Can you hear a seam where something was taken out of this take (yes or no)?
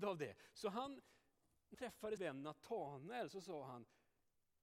yes